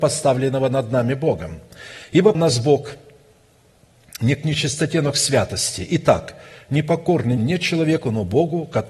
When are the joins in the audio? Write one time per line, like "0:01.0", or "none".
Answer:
0:02.3
0:07.4